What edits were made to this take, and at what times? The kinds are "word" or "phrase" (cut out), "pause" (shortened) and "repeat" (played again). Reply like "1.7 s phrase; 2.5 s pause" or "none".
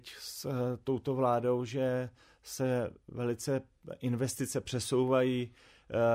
none